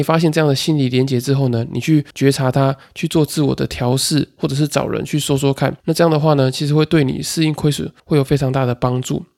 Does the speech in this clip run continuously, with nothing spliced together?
no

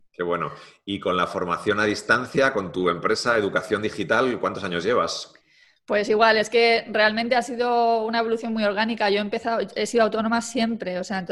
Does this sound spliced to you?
no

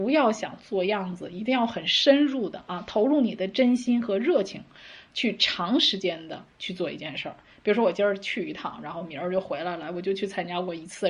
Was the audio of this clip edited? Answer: no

